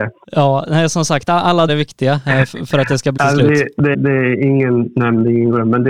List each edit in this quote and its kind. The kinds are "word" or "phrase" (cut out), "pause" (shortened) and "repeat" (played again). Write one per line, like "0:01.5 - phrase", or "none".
0:01.7 - word
0:03.2 - word
0:03.9 - word